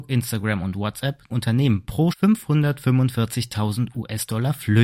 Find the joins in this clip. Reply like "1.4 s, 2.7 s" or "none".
1.3 s, 2.1 s